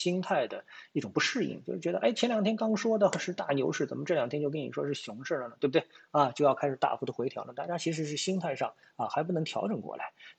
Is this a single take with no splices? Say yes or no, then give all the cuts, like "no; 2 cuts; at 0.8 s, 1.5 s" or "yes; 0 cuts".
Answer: yes; 0 cuts